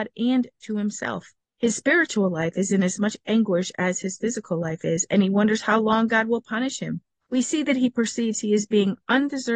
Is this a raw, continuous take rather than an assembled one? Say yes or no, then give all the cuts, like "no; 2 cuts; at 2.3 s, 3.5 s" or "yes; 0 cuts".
no; 2 cuts; at 1.4 s, 7.1 s